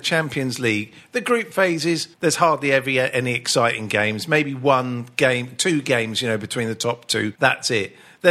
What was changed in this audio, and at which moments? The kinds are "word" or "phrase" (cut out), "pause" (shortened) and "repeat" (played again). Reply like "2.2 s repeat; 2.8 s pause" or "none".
2.1 s pause; 7.4 s pause